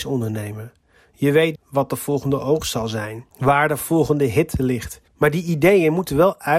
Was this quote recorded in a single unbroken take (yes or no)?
no